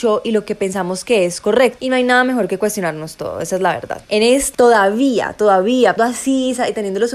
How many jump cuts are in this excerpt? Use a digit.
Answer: 2